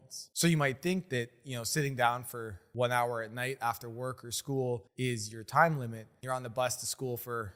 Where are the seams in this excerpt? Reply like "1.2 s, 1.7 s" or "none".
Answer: 6.2 s

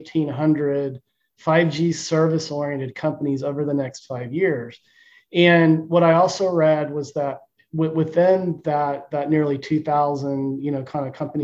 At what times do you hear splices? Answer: none

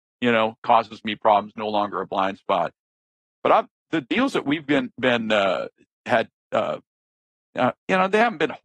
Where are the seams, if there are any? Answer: none

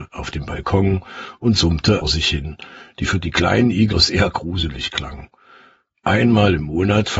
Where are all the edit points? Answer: 2.0 s, 3.9 s

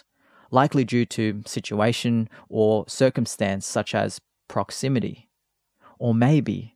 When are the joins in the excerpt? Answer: none

